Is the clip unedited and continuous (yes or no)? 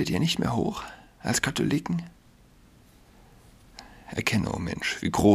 yes